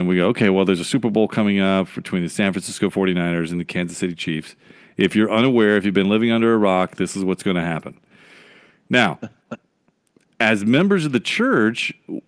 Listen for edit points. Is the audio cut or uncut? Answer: uncut